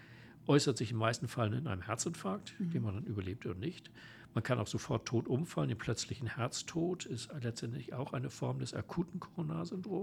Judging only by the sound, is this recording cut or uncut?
uncut